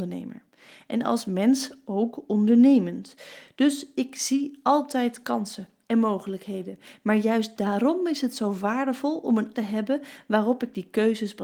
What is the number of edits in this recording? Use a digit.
1